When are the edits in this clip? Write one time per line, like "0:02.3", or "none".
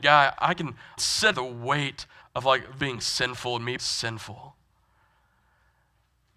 0:01.0
0:01.3
0:02.2
0:02.8
0:03.8

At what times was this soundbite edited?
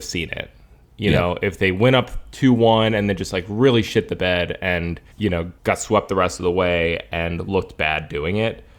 0:05.1
0:05.6

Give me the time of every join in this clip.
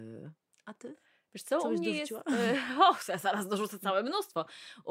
none

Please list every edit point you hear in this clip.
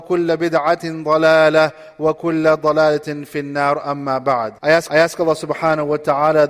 0:04.6
0:04.9

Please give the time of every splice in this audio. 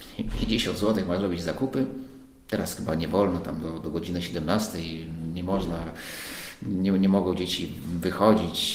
none

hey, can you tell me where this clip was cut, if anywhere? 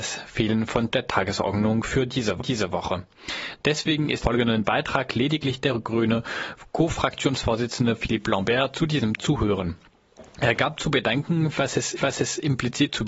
0:00.9
0:02.4
0:04.2
0:09.2
0:12.0

